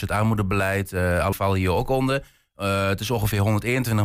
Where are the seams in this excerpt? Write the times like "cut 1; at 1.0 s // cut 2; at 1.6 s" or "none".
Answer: cut 1; at 1.3 s